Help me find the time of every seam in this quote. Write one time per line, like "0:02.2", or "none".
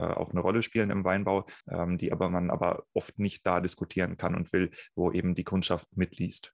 0:01.6